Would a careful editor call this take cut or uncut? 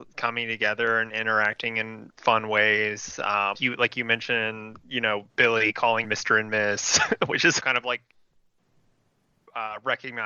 cut